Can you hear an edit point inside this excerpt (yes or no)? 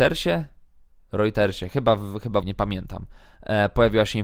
yes